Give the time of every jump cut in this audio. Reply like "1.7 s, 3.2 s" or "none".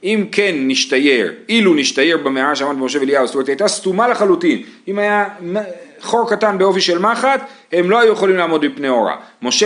none